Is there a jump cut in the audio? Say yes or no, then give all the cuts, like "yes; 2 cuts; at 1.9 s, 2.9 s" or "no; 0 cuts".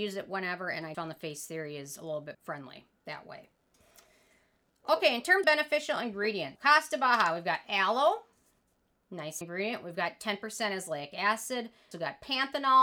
yes; 6 cuts; at 0.9 s, 2.3 s, 5.4 s, 6.6 s, 9.4 s, 11.9 s